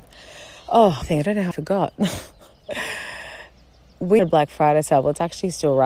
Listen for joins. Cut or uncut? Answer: cut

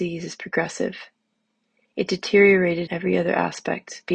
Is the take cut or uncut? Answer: cut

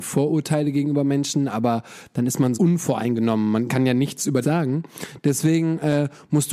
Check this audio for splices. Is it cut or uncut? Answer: cut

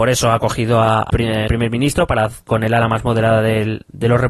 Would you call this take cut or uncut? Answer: cut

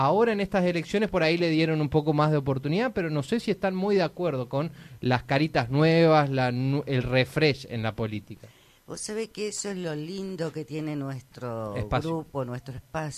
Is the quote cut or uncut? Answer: uncut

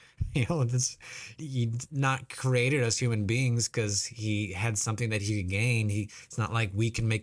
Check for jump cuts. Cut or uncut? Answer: cut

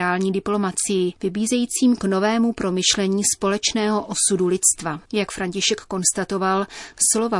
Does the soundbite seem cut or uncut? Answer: cut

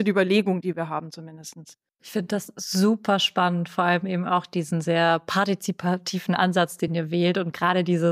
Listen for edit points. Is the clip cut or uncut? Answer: uncut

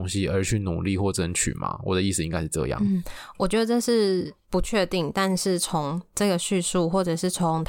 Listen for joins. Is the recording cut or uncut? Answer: cut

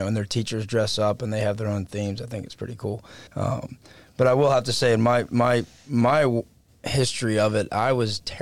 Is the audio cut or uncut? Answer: cut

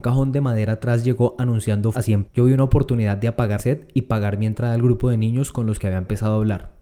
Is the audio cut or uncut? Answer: cut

